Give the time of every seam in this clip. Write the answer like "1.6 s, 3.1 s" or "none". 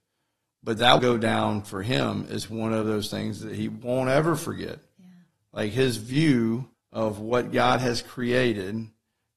1.0 s, 6.7 s